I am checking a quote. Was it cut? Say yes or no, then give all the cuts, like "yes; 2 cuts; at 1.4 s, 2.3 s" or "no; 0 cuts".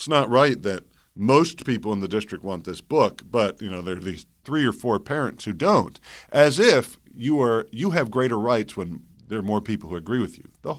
no; 0 cuts